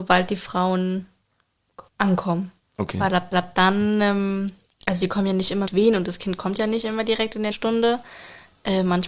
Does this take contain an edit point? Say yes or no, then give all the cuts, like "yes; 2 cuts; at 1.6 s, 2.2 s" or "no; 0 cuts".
yes; 4 cuts; at 1.9 s, 3.3 s, 5.7 s, 7.5 s